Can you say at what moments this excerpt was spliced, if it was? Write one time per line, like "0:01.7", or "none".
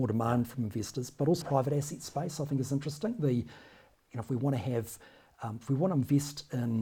0:01.4